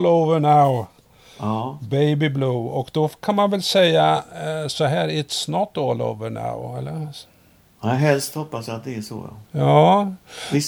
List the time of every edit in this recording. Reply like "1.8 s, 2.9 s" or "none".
none